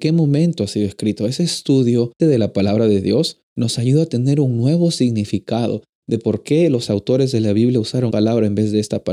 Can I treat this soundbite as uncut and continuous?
no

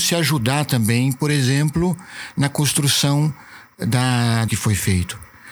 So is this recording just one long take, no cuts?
no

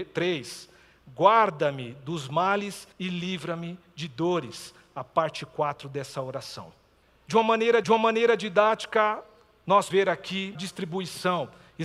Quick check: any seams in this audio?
yes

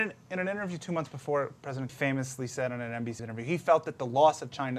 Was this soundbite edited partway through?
yes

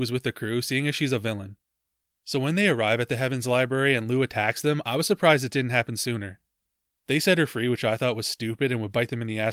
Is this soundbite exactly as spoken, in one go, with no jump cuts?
yes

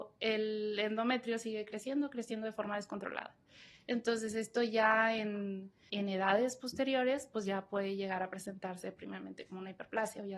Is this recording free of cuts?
no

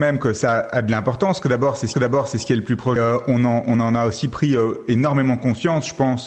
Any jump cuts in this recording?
yes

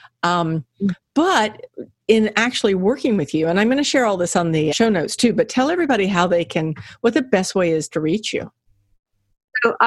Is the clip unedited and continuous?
no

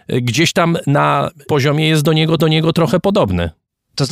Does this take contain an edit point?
yes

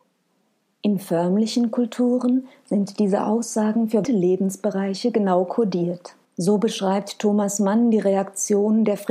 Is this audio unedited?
no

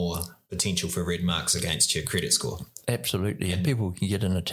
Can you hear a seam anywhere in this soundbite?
no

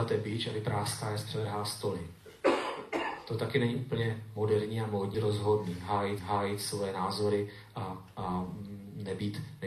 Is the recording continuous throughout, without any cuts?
no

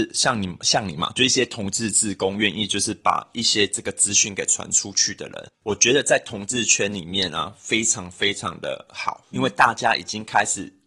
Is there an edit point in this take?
yes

